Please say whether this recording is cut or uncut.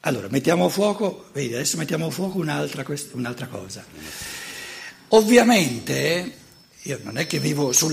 uncut